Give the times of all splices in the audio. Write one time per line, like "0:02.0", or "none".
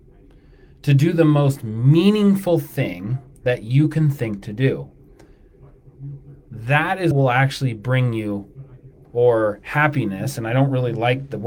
0:06.4
0:07.1
0:09.0